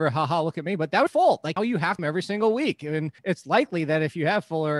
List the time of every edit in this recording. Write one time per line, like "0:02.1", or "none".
0:01.1
0:01.6
0:02.0
0:03.2